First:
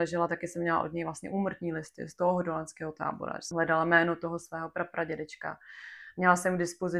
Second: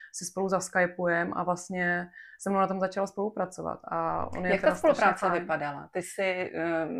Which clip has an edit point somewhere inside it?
first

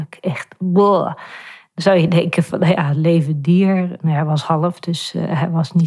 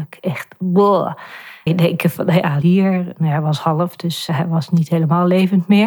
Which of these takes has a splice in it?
second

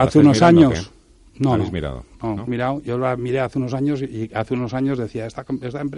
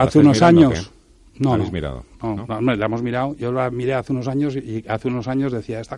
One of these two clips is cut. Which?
first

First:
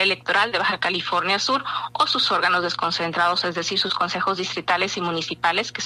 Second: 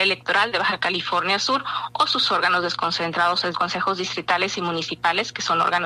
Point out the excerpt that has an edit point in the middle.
second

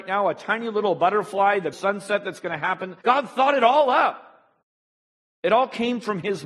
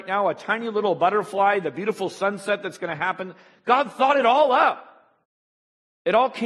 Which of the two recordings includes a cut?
first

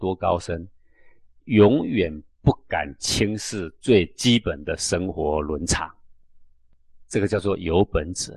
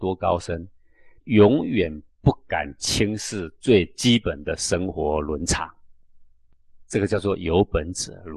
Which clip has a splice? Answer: second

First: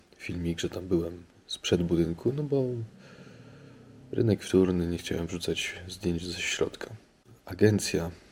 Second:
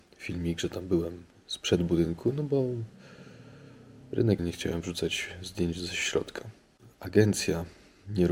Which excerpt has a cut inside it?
second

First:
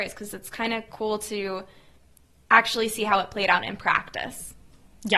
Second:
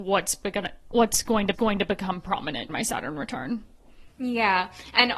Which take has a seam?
second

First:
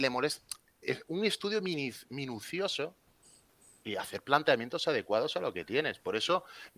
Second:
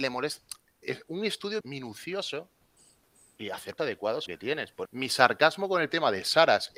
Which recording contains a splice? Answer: second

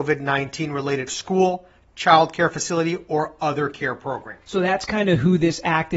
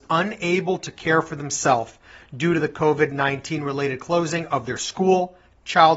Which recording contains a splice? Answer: first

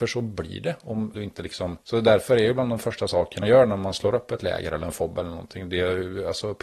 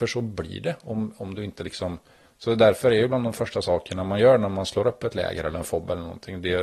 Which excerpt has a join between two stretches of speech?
first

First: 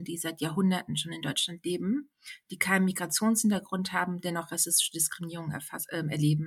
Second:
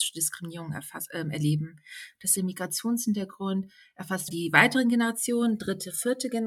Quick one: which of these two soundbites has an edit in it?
second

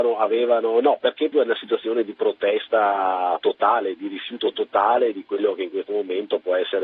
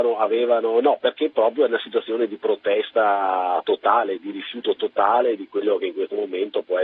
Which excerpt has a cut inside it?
first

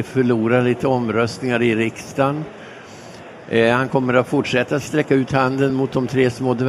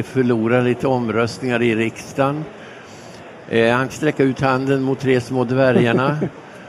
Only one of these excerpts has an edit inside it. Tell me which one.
second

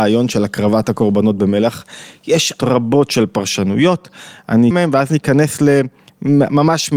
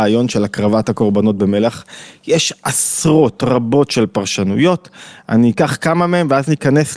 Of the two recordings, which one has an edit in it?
first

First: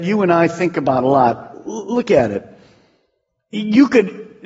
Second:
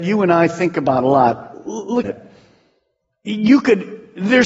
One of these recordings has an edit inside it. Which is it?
second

